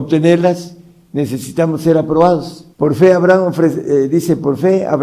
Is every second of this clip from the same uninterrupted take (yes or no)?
no